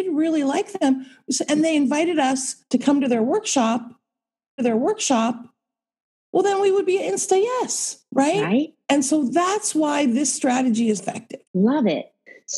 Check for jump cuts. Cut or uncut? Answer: cut